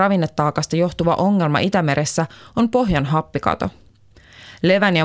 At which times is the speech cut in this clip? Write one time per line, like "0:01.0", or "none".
none